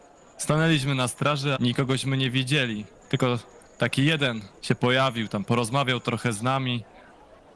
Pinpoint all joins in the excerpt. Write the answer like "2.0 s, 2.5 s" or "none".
1.6 s, 3.0 s, 4.6 s